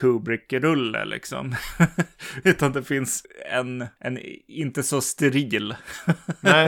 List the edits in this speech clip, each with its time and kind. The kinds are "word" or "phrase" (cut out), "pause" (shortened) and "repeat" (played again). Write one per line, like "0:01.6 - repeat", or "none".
0:02.4 - word